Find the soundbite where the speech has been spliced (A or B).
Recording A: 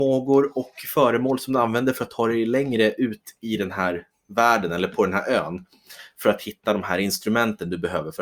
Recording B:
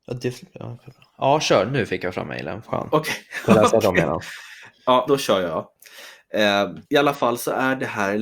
B